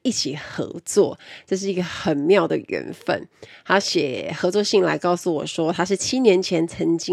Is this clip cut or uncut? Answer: uncut